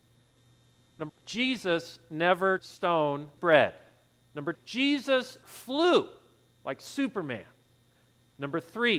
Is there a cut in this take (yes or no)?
yes